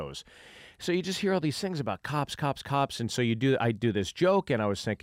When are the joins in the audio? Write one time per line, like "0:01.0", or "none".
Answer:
none